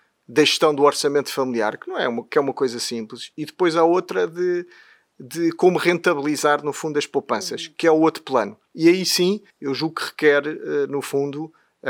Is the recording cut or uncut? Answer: cut